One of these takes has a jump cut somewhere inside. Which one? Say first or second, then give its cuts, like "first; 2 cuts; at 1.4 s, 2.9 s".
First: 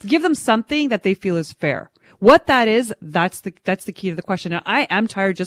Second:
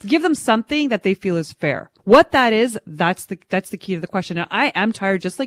second; 1 cut; at 2.0 s